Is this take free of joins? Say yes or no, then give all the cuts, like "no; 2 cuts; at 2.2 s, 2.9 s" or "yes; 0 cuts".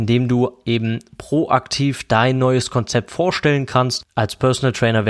yes; 0 cuts